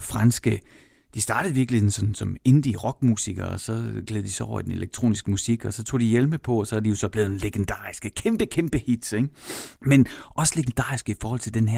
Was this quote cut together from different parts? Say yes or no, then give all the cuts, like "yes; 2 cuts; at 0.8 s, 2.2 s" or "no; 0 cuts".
yes; 1 cut; at 9.8 s